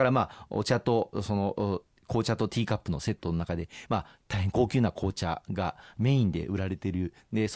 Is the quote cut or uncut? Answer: uncut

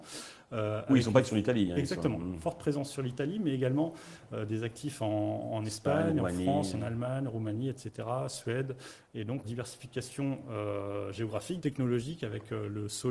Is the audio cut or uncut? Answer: cut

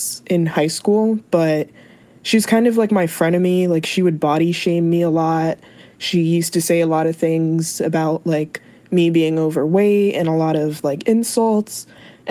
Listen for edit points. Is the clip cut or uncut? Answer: uncut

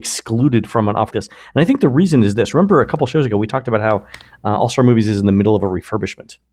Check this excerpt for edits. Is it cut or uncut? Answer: cut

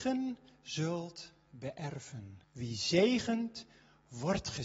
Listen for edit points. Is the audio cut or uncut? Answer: cut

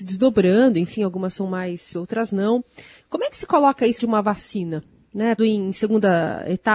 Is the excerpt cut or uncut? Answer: cut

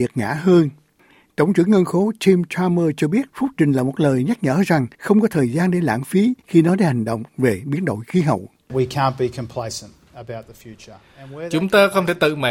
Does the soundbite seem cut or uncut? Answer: cut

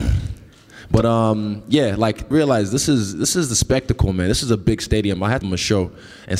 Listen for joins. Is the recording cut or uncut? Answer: cut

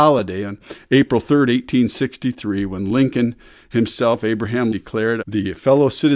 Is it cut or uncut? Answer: cut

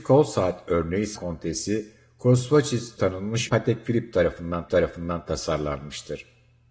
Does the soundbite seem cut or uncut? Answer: cut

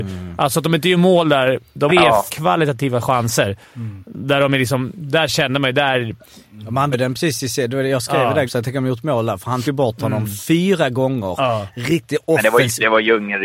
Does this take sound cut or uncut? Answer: cut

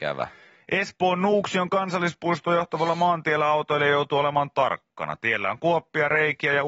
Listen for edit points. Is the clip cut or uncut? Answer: uncut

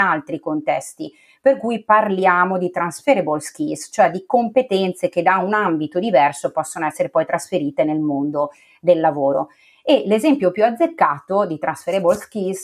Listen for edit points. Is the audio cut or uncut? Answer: uncut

